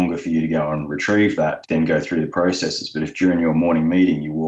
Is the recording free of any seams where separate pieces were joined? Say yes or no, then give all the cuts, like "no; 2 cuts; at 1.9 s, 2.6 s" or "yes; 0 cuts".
no; 1 cut; at 1.6 s